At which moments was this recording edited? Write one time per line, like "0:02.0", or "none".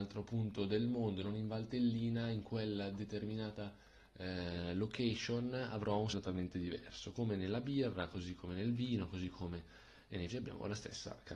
0:06.1
0:10.3